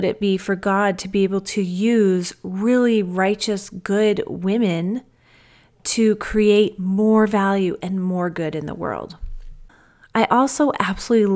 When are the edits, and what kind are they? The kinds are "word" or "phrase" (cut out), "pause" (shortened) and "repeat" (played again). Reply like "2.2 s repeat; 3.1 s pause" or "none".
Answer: none